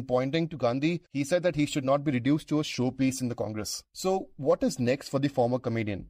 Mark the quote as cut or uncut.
uncut